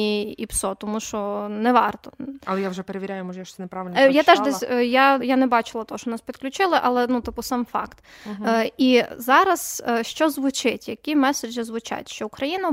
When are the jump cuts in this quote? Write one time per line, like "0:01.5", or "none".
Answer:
0:05.2